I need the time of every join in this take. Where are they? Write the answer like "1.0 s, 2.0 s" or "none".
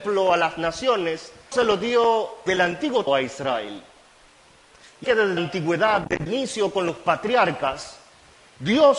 1.5 s, 2.5 s, 3.1 s, 5.0 s, 5.4 s, 6.3 s